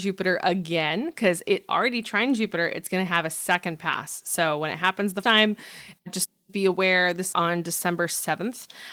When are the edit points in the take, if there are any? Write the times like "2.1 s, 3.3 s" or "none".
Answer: 5.2 s, 6.0 s, 7.3 s